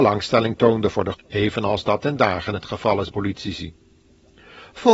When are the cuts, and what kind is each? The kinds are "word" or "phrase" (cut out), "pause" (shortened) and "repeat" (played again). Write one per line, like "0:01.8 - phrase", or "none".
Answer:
0:01.1 - word
0:02.0 - word
0:03.1 - word